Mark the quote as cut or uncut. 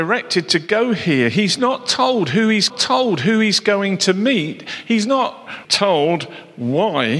cut